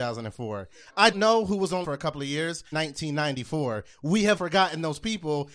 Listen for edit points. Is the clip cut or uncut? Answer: cut